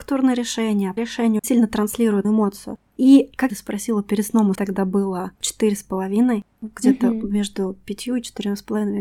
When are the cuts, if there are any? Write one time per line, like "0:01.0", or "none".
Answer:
0:01.0
0:01.4
0:02.2
0:03.5
0:04.5
0:05.4